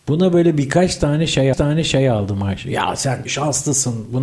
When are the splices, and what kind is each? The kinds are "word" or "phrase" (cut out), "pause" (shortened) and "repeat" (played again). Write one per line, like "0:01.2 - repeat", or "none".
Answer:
0:01.5 - repeat
0:03.2 - word